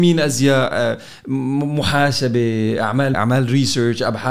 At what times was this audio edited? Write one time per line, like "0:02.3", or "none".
0:03.1